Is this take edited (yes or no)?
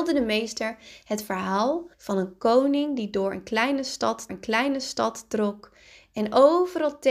yes